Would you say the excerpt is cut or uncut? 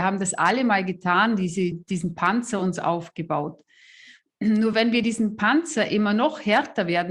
uncut